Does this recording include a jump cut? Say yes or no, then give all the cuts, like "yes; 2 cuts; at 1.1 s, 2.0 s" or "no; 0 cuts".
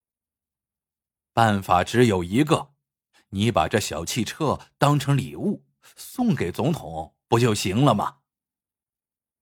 no; 0 cuts